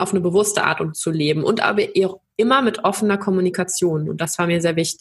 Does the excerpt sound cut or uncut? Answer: cut